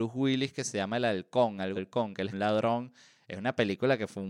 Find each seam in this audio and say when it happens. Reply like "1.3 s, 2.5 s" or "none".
1.8 s, 2.3 s